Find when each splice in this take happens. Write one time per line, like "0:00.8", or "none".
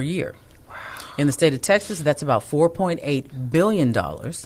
none